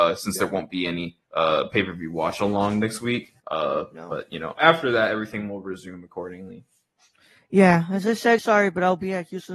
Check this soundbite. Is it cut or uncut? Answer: cut